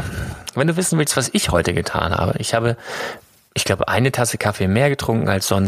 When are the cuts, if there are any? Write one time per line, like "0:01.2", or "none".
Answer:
none